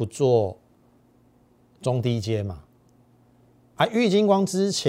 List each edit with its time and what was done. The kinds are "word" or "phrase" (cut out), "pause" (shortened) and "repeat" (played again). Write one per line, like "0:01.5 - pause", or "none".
none